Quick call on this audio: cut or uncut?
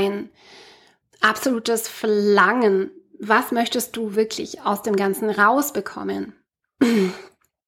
uncut